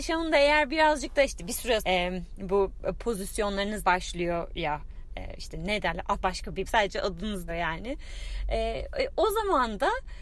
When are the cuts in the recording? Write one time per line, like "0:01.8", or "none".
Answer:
0:01.8
0:03.8
0:06.2
0:06.7
0:07.5

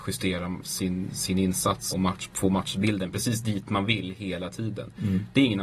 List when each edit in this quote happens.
0:01.9

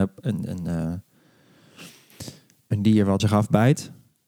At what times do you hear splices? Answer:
0:03.2

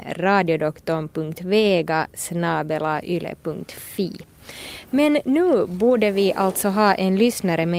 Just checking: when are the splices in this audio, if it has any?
none

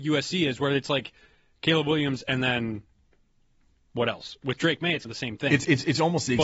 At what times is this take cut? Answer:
0:05.0

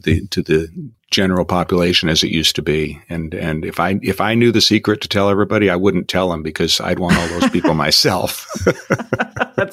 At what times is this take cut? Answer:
none

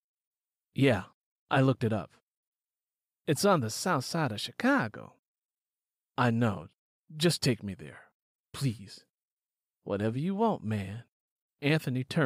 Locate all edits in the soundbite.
none

